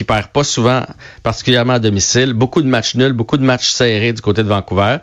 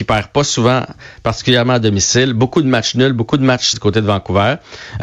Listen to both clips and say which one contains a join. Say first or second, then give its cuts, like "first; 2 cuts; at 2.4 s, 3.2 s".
second; 1 cut; at 3.7 s